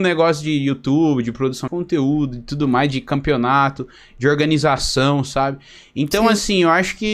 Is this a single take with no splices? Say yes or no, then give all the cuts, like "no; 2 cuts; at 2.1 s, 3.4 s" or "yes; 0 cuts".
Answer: no; 1 cut; at 1.7 s